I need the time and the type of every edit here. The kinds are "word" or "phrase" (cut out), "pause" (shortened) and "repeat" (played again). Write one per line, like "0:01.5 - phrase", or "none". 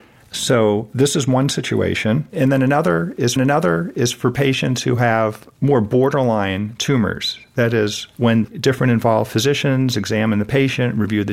0:03.4 - repeat
0:08.4 - word